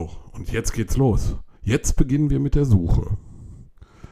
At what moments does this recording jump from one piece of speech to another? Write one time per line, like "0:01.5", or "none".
0:01.6